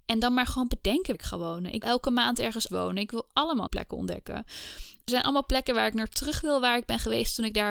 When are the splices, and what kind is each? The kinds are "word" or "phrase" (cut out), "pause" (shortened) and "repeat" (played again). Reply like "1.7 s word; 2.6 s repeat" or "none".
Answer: 1.1 s word; 1.8 s word; 2.7 s word; 3.7 s word; 5.1 s word